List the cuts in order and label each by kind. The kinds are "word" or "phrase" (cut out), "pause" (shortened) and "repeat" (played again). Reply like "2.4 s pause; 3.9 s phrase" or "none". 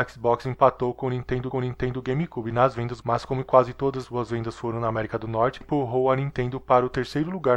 1.5 s repeat; 3.0 s word; 4.0 s word; 5.6 s word